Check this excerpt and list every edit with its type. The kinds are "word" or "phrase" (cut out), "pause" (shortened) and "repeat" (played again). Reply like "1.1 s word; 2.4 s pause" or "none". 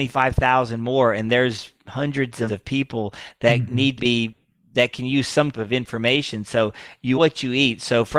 2.5 s word; 4.0 s word; 5.5 s word; 7.1 s word